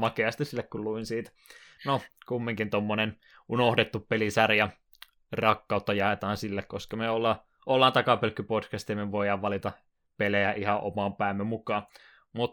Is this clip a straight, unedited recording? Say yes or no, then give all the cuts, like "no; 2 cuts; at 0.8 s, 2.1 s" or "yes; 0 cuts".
yes; 0 cuts